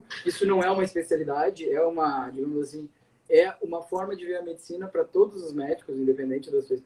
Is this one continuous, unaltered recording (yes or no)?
yes